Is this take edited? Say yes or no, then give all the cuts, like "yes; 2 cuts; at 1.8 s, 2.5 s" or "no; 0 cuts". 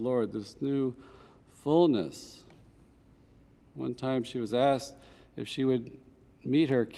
no; 0 cuts